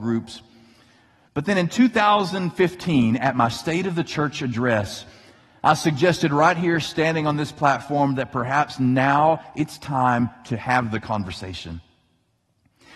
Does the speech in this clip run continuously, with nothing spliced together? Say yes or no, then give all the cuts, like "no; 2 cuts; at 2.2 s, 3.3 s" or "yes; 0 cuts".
yes; 0 cuts